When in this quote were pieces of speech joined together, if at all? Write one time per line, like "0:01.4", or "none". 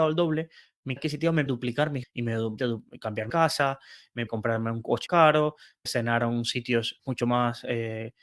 0:01.0
0:01.5
0:02.0
0:02.6
0:03.3
0:04.3
0:05.1
0:05.9
0:07.0